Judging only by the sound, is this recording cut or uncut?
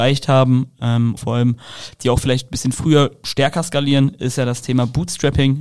cut